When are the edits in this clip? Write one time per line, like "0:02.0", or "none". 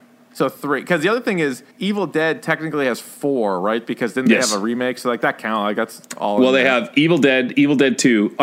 0:01.7

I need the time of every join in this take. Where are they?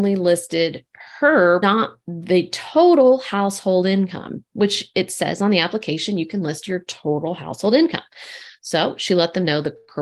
0:01.6

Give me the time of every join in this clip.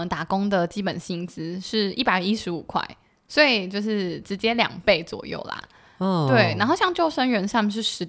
none

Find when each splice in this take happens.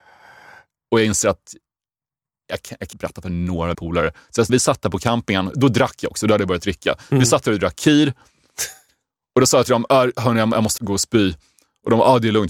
0:02.9
0:03.7
0:04.5
0:05.5
0:10.8

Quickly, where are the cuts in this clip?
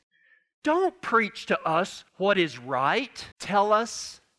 0:02.1
0:03.3

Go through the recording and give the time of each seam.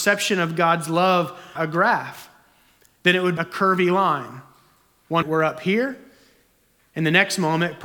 0:01.6
0:03.4
0:05.2

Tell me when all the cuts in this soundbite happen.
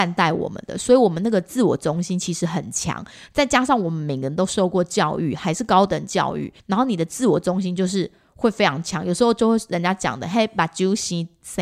0:06.6

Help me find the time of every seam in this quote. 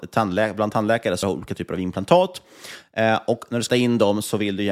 0:01.2
0:03.7

